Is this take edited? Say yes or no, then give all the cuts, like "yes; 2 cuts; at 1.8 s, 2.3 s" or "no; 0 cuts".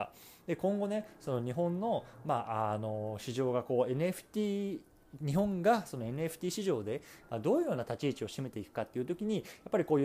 no; 0 cuts